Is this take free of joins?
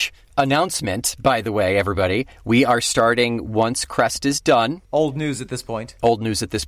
no; 2 cuts; at 2.3 s, 4.8 s

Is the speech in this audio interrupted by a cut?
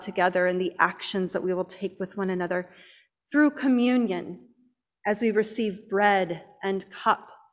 no; 0 cuts

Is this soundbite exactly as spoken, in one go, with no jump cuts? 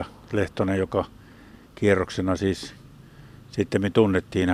yes; 0 cuts

